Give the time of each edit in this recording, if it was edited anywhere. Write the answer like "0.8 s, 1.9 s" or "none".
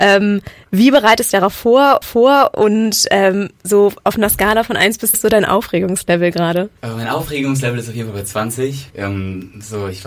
1.3 s, 2.0 s, 5.1 s, 6.8 s, 8.9 s